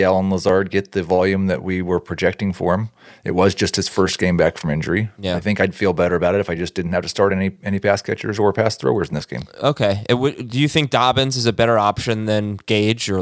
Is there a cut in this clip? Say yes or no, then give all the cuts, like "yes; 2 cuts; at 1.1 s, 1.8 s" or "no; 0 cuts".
no; 0 cuts